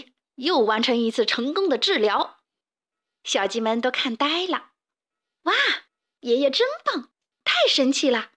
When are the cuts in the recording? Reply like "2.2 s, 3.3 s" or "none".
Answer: 2.4 s